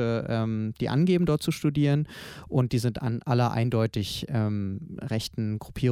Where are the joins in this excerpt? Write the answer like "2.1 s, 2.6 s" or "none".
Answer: none